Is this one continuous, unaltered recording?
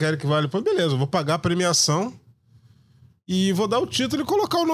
yes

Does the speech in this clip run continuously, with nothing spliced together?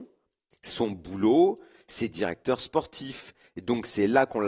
yes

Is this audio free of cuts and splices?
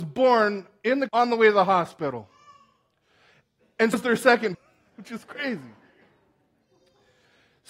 no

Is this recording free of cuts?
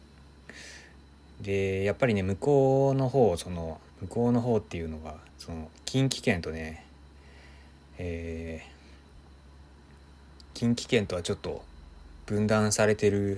no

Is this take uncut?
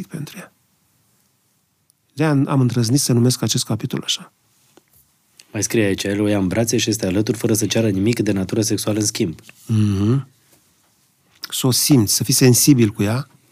yes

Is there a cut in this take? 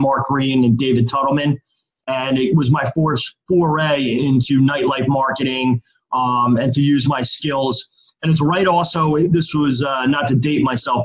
no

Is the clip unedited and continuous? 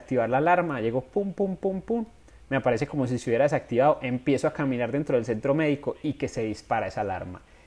yes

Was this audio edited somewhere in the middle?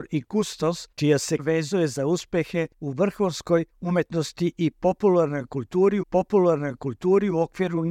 yes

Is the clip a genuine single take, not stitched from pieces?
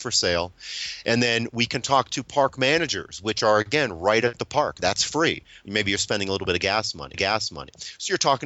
no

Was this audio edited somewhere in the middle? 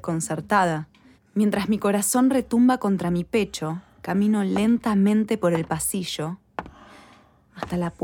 yes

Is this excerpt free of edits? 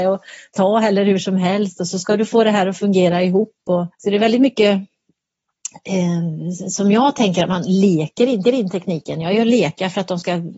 no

